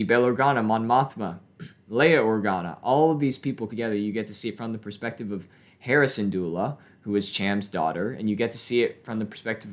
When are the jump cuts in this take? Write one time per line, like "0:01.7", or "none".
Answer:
0:03.7